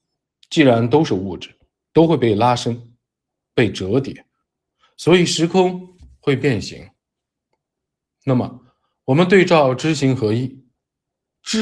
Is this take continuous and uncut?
yes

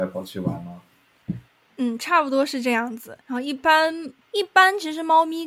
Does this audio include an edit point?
yes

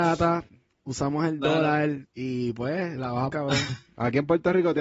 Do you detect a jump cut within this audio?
yes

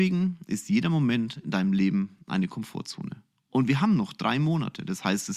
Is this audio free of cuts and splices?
yes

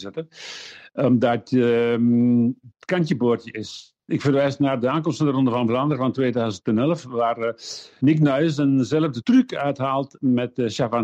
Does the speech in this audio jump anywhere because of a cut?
yes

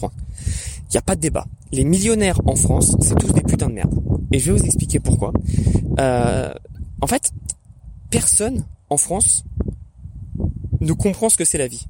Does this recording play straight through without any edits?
yes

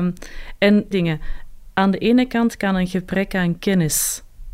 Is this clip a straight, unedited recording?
no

